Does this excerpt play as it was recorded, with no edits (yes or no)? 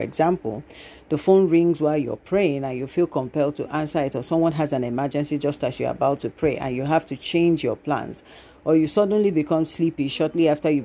yes